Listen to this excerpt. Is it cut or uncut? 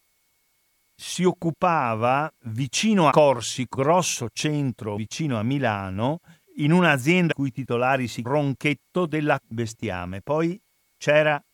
cut